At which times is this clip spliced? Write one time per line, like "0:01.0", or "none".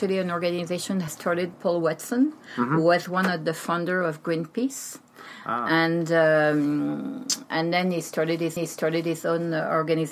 0:01.1
0:01.5
0:08.6